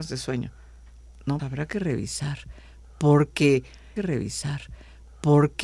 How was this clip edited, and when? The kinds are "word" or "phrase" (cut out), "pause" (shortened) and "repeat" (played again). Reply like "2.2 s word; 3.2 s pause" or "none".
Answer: 1.4 s word; 4.0 s repeat